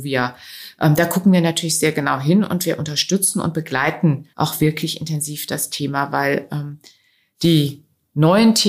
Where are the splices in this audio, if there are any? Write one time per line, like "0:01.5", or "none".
0:04.3